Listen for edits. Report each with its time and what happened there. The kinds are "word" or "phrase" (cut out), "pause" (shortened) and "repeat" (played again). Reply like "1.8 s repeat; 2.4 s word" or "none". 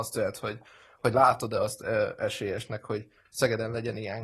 none